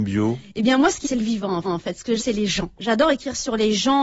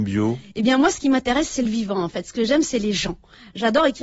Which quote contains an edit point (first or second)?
first